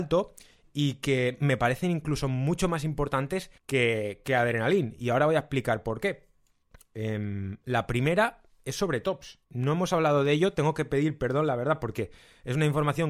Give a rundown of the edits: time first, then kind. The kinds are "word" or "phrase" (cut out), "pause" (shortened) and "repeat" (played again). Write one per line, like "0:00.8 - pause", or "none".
0:03.6 - pause
0:06.7 - pause
0:09.4 - pause